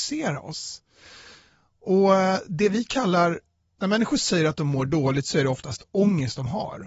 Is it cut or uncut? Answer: cut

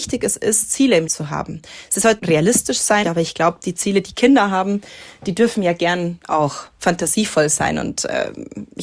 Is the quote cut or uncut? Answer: cut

